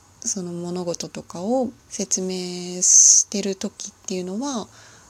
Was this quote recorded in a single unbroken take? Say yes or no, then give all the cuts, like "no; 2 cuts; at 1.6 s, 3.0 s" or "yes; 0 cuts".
no; 1 cut; at 1.8 s